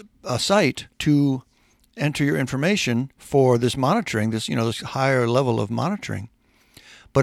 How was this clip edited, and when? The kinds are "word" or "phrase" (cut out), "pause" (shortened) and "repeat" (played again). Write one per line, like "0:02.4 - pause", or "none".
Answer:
0:00.9 - pause
0:03.1 - pause